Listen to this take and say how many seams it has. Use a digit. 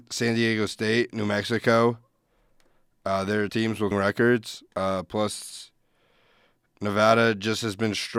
3